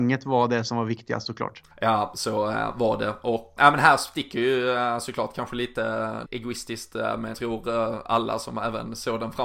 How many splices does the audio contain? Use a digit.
4